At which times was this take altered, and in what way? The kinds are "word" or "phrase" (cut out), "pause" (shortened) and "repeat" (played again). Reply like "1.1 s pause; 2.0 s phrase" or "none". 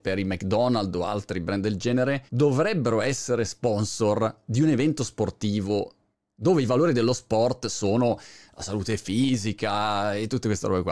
2.3 s pause